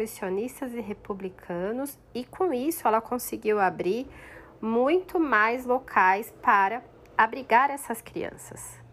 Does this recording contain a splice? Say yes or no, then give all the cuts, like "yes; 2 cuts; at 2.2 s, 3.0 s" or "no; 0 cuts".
no; 0 cuts